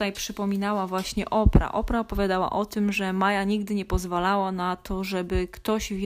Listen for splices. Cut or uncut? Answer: uncut